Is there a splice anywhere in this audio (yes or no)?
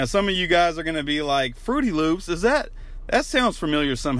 no